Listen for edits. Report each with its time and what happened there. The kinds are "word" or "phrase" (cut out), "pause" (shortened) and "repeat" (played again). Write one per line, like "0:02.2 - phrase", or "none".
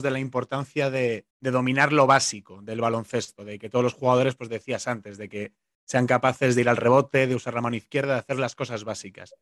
0:01.3 - pause